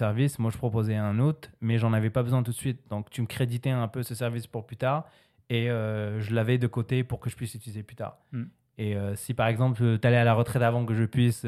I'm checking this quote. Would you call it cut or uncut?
uncut